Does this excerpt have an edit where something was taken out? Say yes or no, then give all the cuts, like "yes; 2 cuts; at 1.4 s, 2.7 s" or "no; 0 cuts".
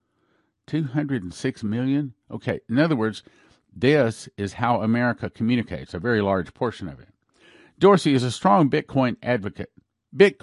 no; 0 cuts